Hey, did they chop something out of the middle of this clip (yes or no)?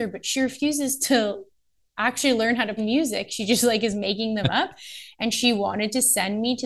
yes